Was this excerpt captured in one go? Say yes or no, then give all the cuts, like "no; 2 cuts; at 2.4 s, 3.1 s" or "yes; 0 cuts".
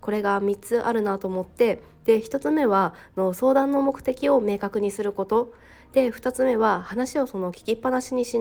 yes; 0 cuts